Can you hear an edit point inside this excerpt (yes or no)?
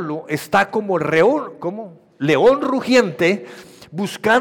no